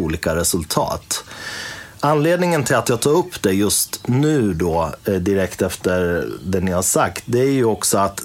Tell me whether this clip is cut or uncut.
uncut